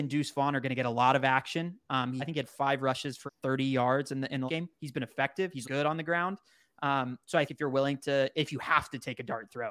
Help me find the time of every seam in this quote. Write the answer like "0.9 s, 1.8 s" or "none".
2.2 s, 3.3 s, 4.5 s, 5.6 s, 7.5 s